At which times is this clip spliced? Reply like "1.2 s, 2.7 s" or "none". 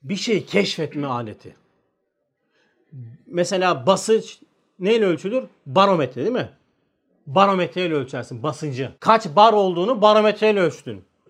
9.0 s